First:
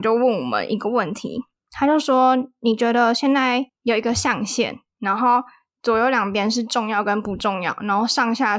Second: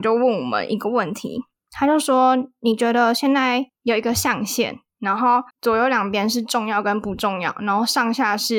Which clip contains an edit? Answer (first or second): second